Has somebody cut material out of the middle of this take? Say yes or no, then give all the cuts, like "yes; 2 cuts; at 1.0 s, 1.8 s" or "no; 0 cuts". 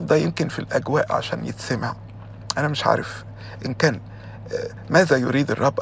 no; 0 cuts